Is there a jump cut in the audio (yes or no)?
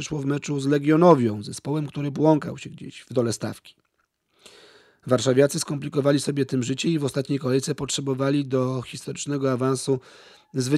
no